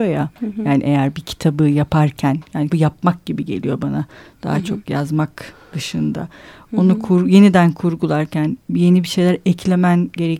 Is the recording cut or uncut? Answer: cut